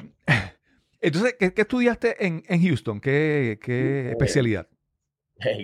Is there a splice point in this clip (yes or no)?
no